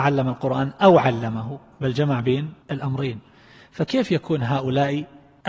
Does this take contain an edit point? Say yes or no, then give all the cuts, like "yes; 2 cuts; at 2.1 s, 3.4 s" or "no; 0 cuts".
yes; 1 cut; at 2.6 s